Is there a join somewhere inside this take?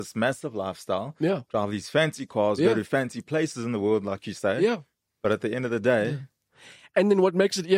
no; 0 cuts

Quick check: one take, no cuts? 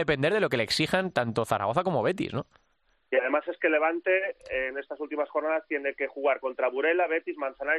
yes; 0 cuts

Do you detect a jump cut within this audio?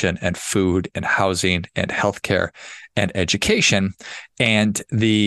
no; 0 cuts

